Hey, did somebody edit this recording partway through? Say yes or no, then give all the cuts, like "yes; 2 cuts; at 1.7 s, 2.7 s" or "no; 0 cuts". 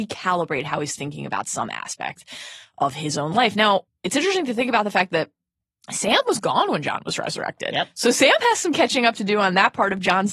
yes; 1 cut; at 3.9 s